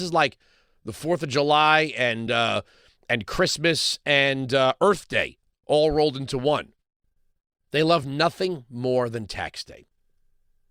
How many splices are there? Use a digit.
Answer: 0